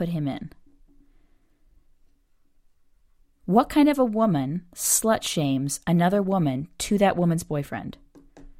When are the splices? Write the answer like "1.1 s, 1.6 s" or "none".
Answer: none